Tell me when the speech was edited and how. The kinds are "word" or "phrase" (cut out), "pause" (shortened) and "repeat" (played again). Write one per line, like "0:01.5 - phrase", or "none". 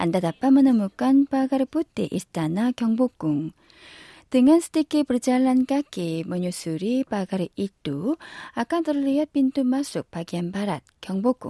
none